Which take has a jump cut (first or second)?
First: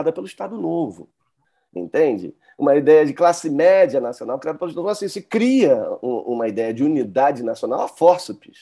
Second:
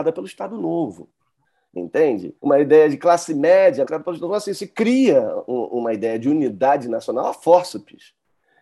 second